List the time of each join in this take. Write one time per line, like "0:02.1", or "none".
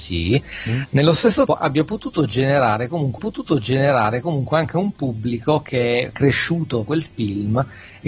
0:01.5
0:03.2
0:06.1
0:06.9